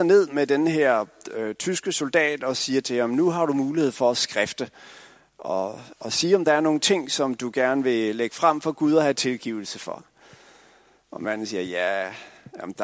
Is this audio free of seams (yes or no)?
yes